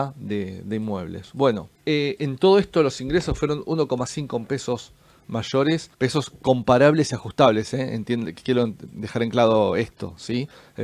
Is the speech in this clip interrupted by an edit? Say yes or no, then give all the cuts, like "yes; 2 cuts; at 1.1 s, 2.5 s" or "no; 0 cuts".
yes; 2 cuts; at 1.8 s, 5.9 s